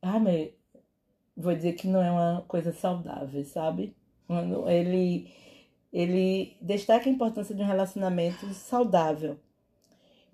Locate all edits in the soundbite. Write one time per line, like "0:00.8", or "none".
none